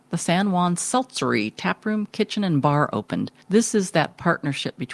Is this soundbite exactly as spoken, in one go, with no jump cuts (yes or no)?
no